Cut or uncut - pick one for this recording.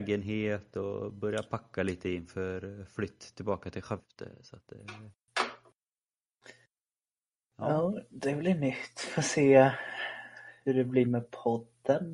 uncut